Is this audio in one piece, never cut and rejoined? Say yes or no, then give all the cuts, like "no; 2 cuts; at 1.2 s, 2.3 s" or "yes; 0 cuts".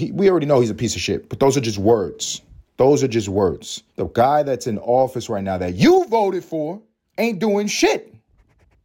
no; 3 cuts; at 2.7 s, 3.9 s, 7.0 s